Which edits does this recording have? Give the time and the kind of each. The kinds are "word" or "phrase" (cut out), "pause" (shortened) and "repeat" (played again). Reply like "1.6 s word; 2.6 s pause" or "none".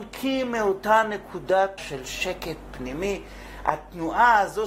1.8 s word